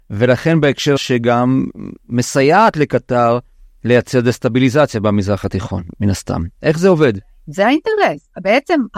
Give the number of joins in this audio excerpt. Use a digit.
1